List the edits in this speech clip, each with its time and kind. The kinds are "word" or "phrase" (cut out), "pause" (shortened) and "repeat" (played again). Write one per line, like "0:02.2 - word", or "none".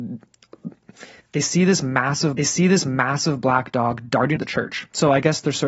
0:01.2 - pause
0:02.4 - repeat
0:04.4 - phrase